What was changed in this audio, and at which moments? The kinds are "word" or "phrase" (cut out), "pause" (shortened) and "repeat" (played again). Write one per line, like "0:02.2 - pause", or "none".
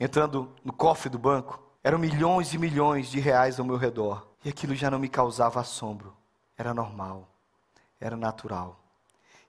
0:01.7 - pause
0:04.3 - pause
0:06.4 - pause

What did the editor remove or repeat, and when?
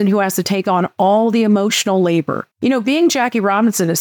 0:02.5 - pause

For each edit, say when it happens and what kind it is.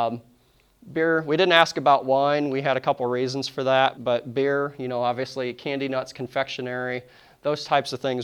0:03.9 - word

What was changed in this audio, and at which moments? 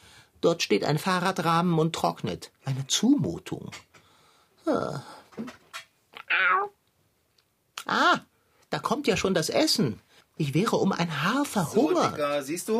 0:10.2 - pause

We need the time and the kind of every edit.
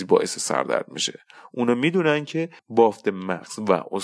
0:02.6 - pause

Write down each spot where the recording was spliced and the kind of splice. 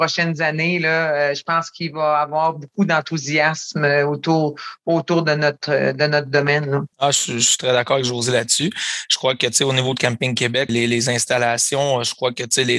0:06.9 - pause
0:10.7 - word

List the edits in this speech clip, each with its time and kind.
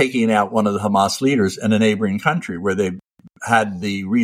none

